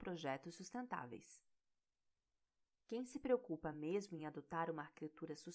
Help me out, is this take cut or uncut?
uncut